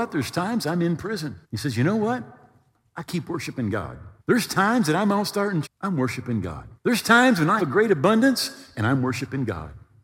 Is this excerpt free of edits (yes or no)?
no